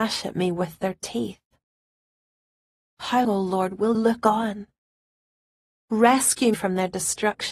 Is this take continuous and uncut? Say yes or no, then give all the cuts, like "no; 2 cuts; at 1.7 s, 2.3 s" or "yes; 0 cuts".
no; 3 cuts; at 3.2 s, 3.9 s, 6.5 s